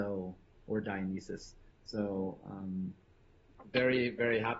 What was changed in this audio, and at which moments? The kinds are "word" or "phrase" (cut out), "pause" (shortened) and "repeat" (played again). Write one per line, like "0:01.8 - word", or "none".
0:01.7 - pause